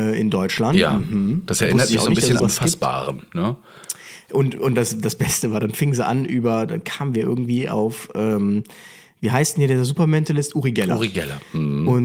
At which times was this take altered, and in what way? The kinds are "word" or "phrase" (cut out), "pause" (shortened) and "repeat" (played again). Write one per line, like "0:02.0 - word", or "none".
0:02.4 - phrase